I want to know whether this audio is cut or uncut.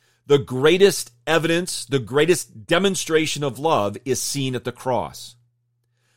uncut